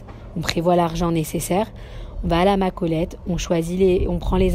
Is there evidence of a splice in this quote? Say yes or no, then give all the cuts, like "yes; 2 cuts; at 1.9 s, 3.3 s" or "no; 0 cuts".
no; 0 cuts